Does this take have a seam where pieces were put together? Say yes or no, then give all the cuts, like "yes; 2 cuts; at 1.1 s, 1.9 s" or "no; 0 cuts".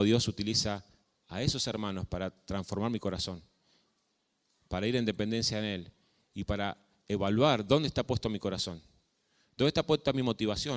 no; 0 cuts